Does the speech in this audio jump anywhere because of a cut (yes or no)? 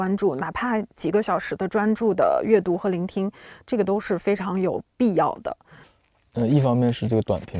no